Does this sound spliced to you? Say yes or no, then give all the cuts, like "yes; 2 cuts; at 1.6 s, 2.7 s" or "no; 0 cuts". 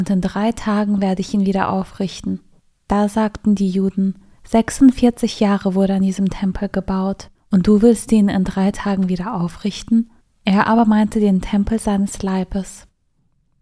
yes; 4 cuts; at 2.6 s, 4.3 s, 7.4 s, 10.2 s